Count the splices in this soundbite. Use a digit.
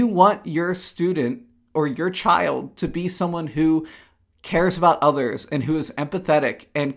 0